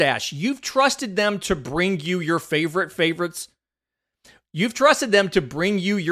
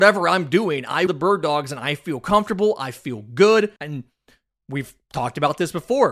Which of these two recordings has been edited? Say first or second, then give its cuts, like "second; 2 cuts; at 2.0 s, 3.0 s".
second; 2 cuts; at 1.1 s, 3.8 s